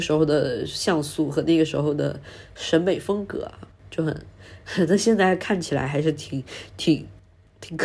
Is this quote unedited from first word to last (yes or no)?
yes